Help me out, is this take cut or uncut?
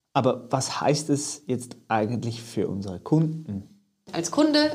uncut